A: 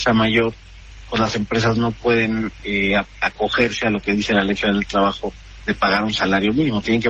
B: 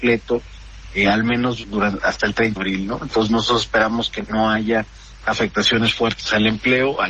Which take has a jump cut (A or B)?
B